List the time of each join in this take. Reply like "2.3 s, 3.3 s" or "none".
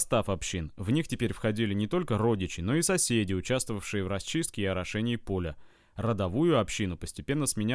none